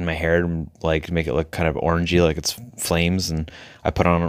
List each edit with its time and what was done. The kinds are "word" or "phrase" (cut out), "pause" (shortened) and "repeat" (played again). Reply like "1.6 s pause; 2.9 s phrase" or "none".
none